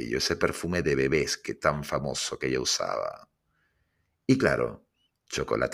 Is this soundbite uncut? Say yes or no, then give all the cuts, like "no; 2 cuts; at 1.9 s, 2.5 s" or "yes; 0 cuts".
yes; 0 cuts